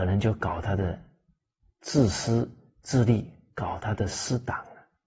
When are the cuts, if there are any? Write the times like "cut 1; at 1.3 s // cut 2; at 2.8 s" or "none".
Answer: none